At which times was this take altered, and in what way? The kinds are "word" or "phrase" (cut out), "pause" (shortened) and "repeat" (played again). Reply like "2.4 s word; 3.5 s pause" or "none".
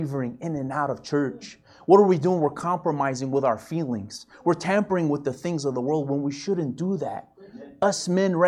none